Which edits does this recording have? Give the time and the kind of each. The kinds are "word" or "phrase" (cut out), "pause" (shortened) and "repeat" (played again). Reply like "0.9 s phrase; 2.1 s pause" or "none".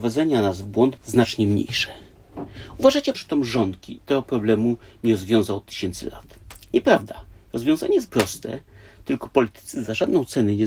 1.0 s word; 3.1 s word; 4.0 s word; 8.1 s word